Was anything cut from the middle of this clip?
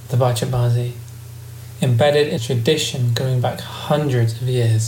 yes; 1 cut; at 2.4 s

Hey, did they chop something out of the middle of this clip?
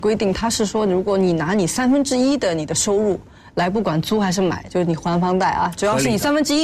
no; 0 cuts

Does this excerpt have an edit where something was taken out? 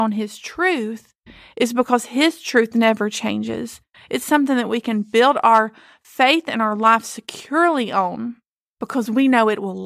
no; 0 cuts

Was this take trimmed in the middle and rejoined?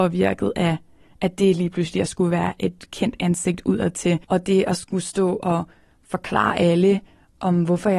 yes; 1 cut; at 4.2 s

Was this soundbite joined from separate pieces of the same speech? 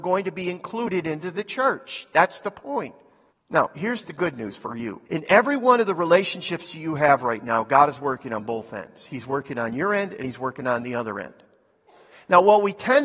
yes; 2 cuts; at 3.3 s, 5.1 s

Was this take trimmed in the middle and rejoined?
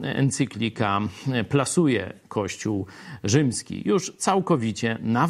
no; 0 cuts

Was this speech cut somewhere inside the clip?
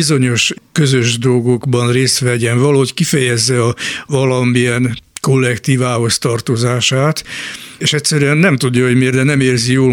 yes; 1 cut; at 5.1 s

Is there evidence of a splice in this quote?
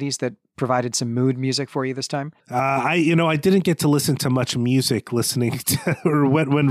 yes; 1 cut; at 2.4 s

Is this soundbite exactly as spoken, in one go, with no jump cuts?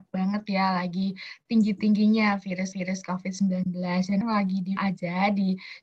no; 3 cuts; at 2.7 s, 4.2 s, 4.8 s

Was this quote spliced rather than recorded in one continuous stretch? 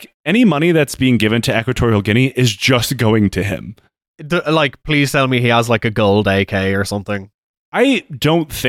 no; 0 cuts

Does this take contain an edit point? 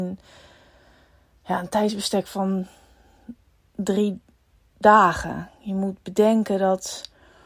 no; 0 cuts

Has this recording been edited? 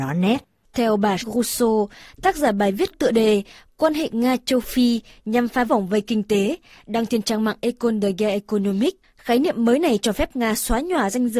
yes; 3 cuts; at 1.2 s, 2.9 s, 5.7 s

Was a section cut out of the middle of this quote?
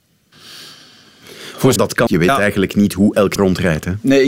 yes; 3 cuts; at 1.8 s, 2.1 s, 3.4 s

